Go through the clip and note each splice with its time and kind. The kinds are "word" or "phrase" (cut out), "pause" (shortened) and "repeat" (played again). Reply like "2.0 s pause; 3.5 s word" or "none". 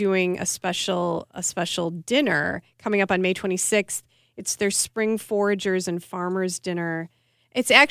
none

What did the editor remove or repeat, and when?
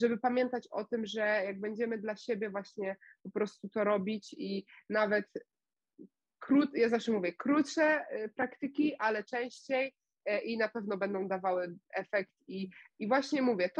none

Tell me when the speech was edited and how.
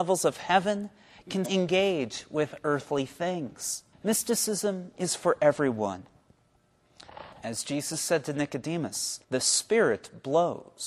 1.4 s word; 3.9 s pause; 7.3 s pause; 9.2 s pause

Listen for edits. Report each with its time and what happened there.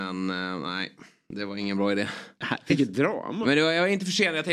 none

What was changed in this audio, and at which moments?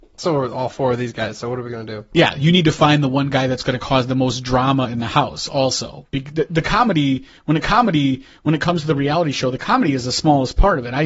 7.6 s repeat

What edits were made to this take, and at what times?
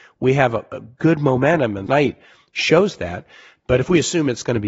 1.9 s word

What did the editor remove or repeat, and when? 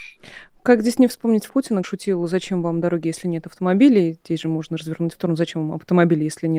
1.5 s word; 1.8 s word; 5.1 s phrase

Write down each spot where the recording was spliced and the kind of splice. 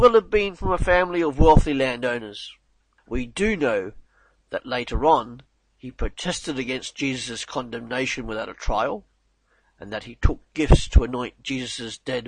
none

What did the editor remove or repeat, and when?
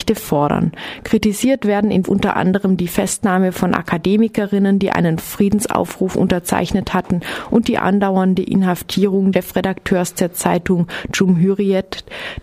2.0 s phrase; 9.3 s word

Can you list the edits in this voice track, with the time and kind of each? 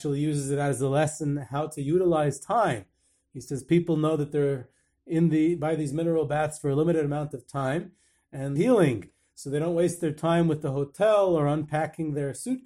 8.6 s phrase

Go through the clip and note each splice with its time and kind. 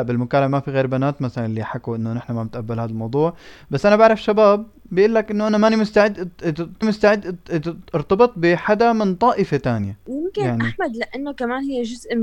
6.8 s repeat

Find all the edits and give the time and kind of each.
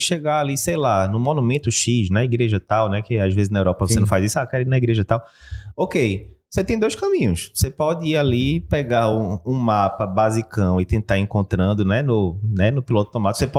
none

